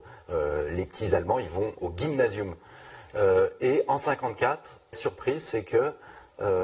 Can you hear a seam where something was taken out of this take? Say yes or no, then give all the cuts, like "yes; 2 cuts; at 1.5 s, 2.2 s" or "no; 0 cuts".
yes; 2 cuts; at 1.8 s, 4.9 s